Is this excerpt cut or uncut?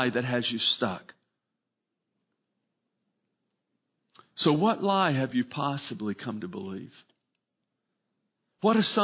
uncut